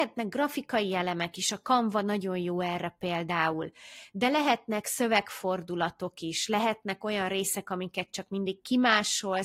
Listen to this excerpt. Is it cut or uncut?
uncut